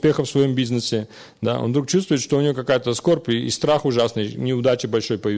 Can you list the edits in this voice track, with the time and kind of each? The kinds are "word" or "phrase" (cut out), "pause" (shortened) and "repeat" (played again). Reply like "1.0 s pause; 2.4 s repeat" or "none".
none